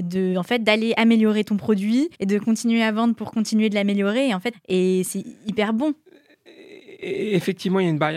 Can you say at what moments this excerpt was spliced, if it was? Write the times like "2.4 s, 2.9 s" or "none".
2.1 s, 4.5 s

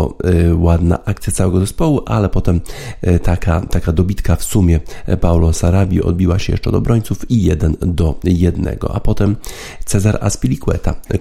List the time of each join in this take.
none

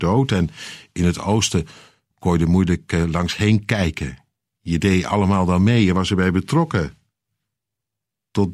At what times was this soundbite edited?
none

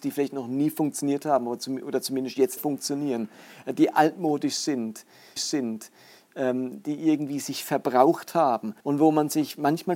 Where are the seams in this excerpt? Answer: 2.6 s, 5.4 s, 8.8 s

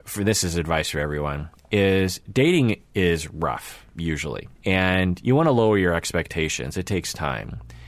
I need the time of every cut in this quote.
4.5 s

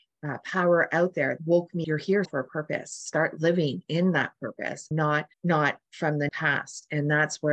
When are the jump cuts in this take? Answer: 1.4 s, 1.8 s, 2.2 s, 4.9 s, 5.3 s, 6.3 s

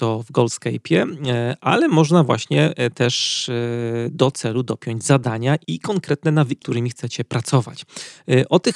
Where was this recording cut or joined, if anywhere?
6.6 s

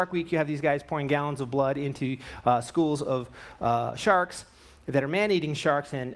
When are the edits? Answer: none

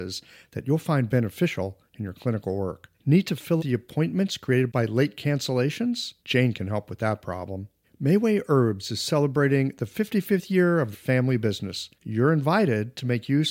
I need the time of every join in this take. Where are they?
2.9 s, 3.6 s, 6.2 s, 7.8 s, 10.9 s, 12.0 s

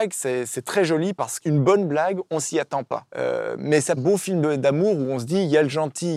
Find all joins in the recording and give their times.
1.4 s, 3.1 s, 4.0 s

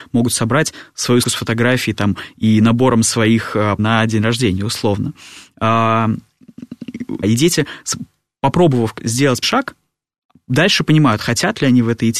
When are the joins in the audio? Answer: 1.2 s, 3.8 s, 7.2 s, 9.4 s

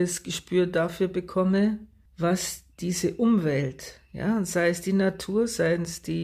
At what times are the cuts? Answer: 2.7 s

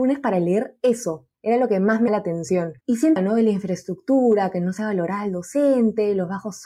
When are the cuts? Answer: 1.3 s, 2.1 s, 2.8 s, 3.2 s

